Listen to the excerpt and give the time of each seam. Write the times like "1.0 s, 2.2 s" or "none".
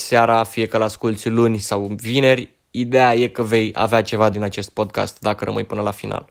4.3 s

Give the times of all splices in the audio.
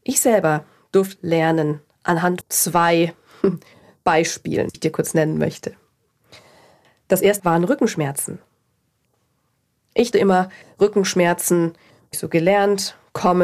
1.2 s, 2.4 s, 4.7 s, 7.4 s, 10.1 s, 12.1 s

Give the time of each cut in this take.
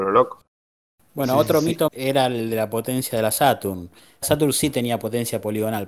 1.9 s, 4.2 s

